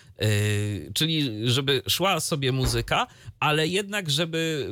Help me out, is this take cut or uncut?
uncut